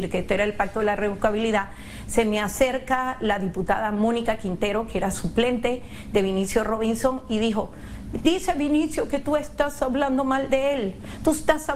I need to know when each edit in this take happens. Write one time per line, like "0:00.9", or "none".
none